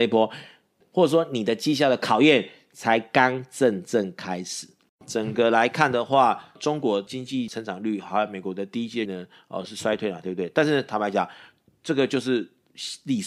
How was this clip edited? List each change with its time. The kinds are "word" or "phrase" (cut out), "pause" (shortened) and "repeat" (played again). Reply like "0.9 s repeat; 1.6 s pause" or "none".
9.1 s word